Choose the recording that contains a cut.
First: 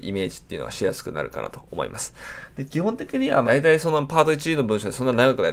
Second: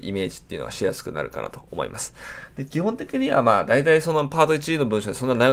first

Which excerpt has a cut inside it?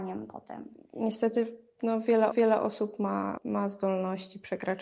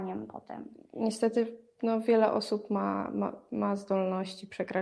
first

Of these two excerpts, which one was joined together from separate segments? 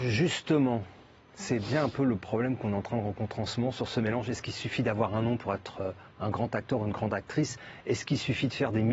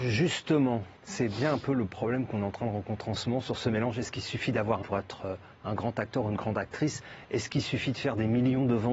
second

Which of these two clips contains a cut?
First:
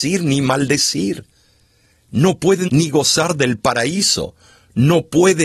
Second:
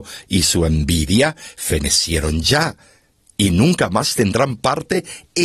first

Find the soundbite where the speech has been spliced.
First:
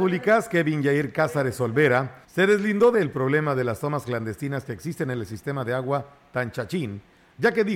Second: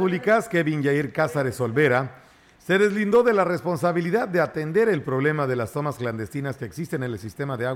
first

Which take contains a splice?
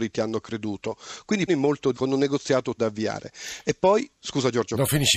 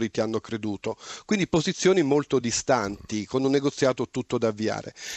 first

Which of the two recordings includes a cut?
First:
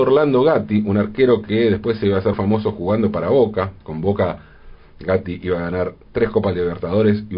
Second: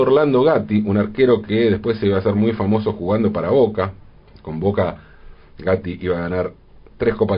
first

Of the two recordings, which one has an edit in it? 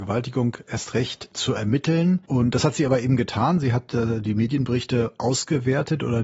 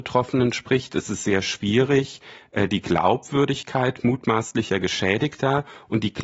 first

